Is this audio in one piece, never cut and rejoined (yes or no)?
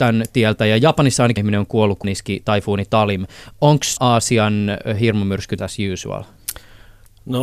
no